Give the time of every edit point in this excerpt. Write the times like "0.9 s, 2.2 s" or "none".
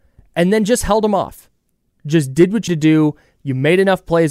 2.7 s

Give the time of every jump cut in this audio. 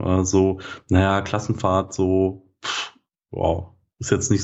none

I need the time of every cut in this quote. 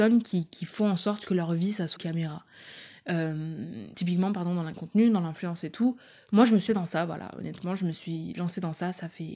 2.0 s, 3.9 s, 4.7 s, 6.7 s

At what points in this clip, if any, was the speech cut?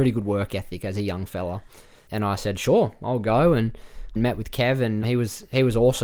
2.1 s, 4.2 s, 5.0 s

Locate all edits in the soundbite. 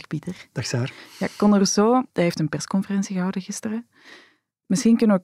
2.1 s

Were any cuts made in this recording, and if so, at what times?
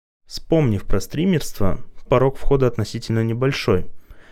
2.1 s

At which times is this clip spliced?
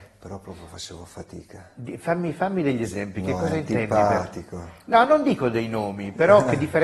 none

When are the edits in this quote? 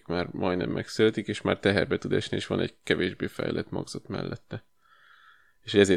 none

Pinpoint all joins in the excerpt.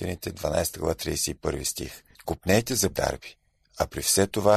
2.1 s, 2.9 s

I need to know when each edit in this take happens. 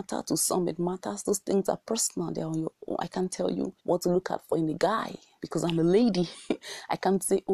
3.8 s

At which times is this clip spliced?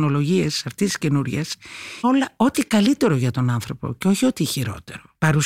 2.0 s

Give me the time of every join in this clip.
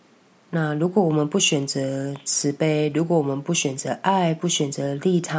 none

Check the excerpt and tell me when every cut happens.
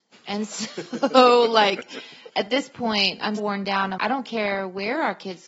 2.3 s, 3.4 s, 4.0 s

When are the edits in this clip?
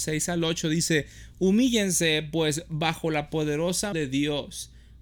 3.9 s

